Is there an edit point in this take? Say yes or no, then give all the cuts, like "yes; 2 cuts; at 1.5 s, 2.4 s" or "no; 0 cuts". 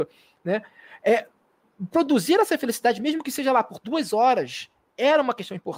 no; 0 cuts